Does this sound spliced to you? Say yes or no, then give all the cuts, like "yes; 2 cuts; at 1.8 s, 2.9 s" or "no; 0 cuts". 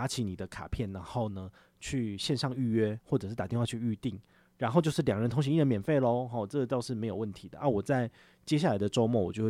no; 0 cuts